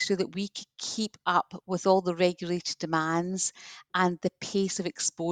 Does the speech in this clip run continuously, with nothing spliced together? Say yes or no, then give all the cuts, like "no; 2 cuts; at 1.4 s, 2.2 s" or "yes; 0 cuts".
yes; 0 cuts